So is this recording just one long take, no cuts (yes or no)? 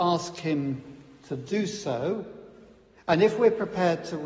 yes